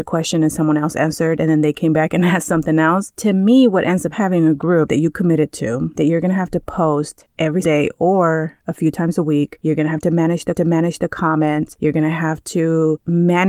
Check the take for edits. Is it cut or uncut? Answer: cut